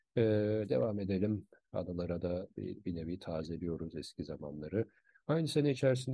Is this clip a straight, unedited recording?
yes; 0 cuts

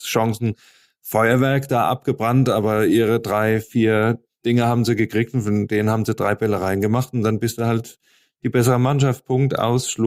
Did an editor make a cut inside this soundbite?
no; 0 cuts

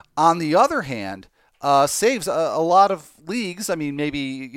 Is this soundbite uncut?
yes; 0 cuts

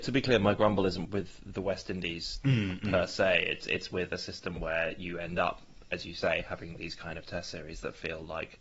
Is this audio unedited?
no; 1 cut; at 1.0 s

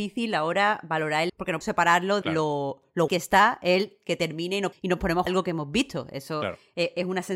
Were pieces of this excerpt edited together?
yes; 6 cuts; at 1.3 s, 1.6 s, 2.2 s, 3.1 s, 4.7 s, 5.3 s

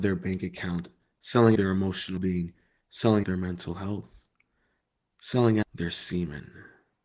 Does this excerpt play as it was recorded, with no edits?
no; 4 cuts; at 1.5 s, 2.2 s, 3.2 s, 5.6 s

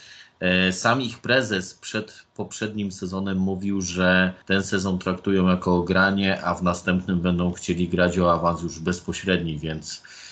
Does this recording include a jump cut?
yes; 1 cut; at 4.4 s

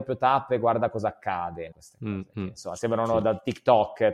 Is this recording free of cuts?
no; 1 cut; at 1.7 s

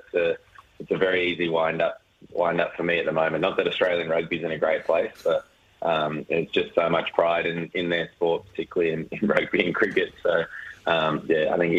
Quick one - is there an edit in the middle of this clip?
no; 0 cuts

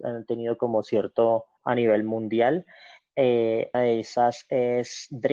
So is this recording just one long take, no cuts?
no; 2 cuts; at 1.6 s, 3.7 s

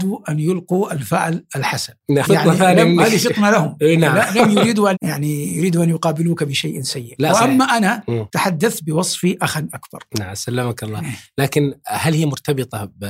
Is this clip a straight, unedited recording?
no; 2 cuts; at 2.2 s, 4.9 s

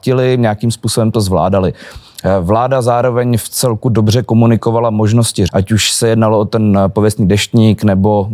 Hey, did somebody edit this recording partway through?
yes; 1 cut; at 5.5 s

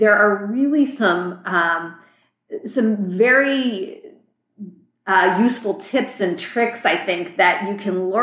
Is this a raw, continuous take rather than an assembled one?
yes; 0 cuts

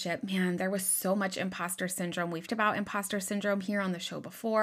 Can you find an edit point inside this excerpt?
yes; 1 cut; at 2.5 s

